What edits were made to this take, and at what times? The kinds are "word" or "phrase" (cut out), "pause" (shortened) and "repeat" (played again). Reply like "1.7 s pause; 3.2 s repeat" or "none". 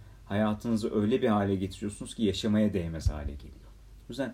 none